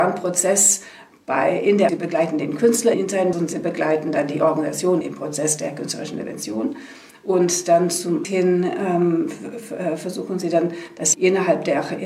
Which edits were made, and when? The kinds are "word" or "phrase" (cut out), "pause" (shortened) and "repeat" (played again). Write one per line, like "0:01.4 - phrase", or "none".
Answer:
0:01.9 - word
0:02.9 - word
0:03.3 - word
0:05.0 - word
0:08.2 - word
0:11.1 - word